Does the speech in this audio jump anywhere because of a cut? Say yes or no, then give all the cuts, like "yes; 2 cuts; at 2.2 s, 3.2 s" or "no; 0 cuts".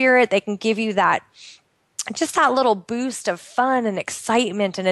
no; 0 cuts